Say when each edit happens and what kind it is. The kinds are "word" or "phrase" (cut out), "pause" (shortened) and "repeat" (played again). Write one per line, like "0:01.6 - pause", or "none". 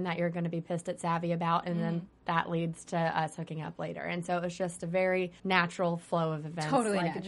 0:05.4 - pause